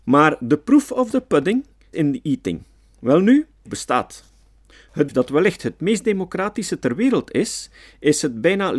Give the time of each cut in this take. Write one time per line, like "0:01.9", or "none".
0:01.9
0:03.7
0:05.1

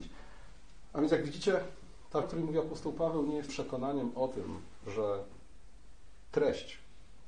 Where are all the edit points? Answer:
0:02.2
0:03.5

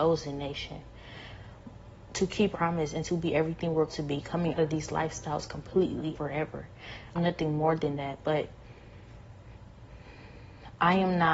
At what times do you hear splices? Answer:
0:02.5
0:03.9
0:04.6
0:06.1
0:07.1

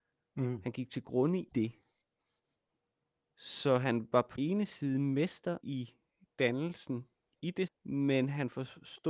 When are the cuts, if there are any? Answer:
0:01.5
0:04.4
0:05.6
0:07.7

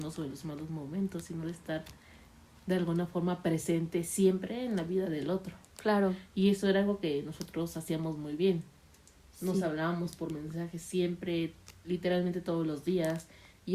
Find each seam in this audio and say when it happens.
none

